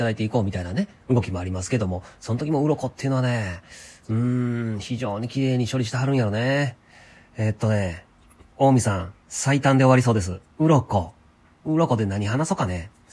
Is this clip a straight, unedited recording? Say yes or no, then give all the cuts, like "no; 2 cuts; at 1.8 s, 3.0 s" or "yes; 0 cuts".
no; 2 cuts; at 9.2 s, 10.5 s